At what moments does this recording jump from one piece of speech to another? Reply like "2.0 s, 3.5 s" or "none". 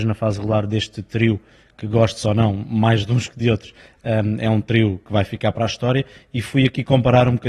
none